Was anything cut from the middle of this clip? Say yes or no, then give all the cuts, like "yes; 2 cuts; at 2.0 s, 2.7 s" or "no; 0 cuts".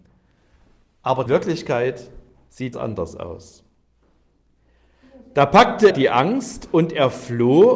yes; 3 cuts; at 1.3 s, 2.7 s, 5.9 s